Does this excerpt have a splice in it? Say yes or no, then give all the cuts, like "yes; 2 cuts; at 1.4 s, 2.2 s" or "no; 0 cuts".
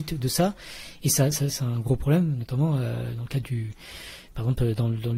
no; 0 cuts